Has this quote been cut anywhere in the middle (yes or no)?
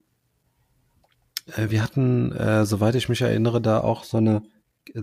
no